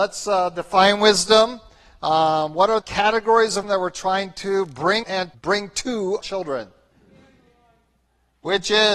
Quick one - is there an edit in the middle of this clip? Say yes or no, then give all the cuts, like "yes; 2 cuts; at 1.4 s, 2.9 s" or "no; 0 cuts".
yes; 5 cuts; at 2.8 s, 3.6 s, 5.0 s, 5.3 s, 6.2 s